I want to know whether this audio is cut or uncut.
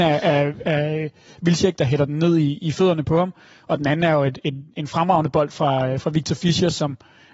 uncut